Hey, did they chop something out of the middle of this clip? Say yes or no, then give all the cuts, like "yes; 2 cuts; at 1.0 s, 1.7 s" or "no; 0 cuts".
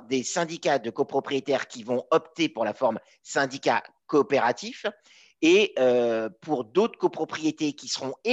no; 0 cuts